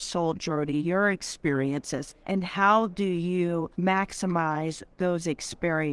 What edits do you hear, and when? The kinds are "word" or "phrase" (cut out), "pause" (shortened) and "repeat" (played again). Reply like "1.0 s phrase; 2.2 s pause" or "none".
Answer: 2.2 s pause; 3.7 s pause